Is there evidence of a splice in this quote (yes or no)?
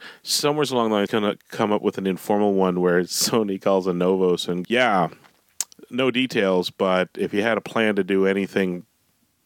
yes